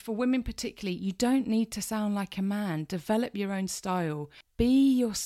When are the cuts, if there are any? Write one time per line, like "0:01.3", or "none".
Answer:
none